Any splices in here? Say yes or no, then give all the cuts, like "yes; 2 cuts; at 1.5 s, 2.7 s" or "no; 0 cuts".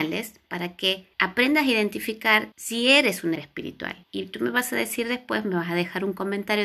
yes; 4 cuts; at 1.1 s, 2.5 s, 3.4 s, 4.0 s